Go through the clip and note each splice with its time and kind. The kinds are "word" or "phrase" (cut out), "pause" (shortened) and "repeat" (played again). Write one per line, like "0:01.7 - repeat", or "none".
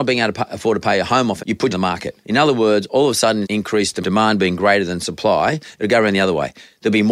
0:01.4 - word
0:01.7 - phrase
0:02.2 - pause
0:03.4 - phrase
0:04.0 - word

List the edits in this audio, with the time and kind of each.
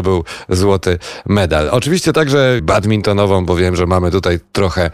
0:02.6 - phrase

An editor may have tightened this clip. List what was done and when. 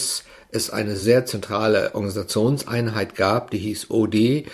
none

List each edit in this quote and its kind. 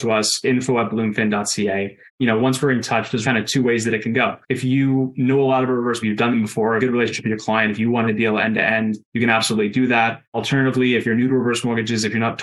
0:02.1 - pause
0:03.2 - word
0:04.4 - pause
0:06.0 - phrase
0:06.8 - phrase
0:08.1 - phrase
0:09.0 - pause
0:10.2 - pause

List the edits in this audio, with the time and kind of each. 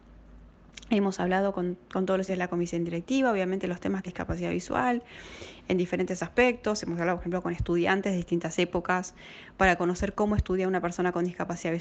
0:02.3 - word
0:04.1 - phrase

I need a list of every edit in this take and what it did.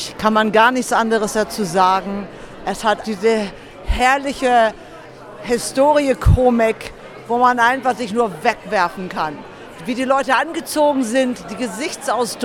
0:03.0 - word

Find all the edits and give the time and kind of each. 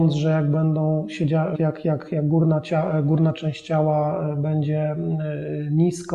0:01.5 - word

